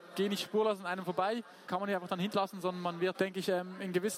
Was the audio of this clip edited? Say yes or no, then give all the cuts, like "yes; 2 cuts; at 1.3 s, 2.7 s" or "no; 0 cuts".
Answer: yes; 3 cuts; at 1.7 s, 2.3 s, 3.1 s